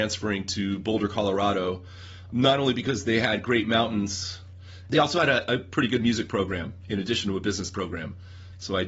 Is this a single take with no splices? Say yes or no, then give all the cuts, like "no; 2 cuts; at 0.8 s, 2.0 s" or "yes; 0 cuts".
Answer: yes; 0 cuts